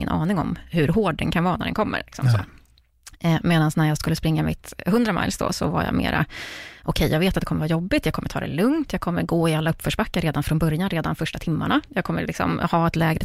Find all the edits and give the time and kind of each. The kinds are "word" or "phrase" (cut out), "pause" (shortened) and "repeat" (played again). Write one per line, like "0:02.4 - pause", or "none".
none